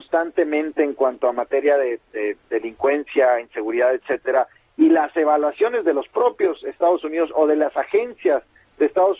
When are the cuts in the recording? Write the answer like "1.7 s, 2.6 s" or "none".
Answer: none